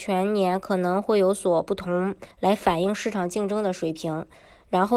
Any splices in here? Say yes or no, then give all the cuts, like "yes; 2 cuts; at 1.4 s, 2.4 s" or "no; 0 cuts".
yes; 1 cut; at 2.3 s